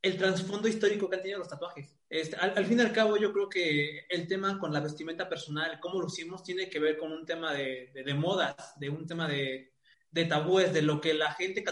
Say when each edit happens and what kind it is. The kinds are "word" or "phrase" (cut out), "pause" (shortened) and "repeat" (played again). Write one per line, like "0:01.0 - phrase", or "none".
0:02.0 - pause
0:09.9 - pause